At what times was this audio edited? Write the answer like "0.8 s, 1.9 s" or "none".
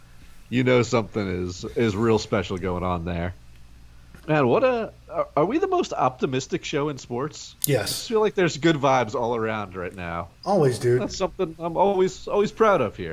4.2 s